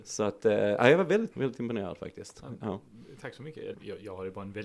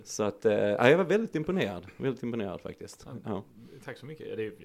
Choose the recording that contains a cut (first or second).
first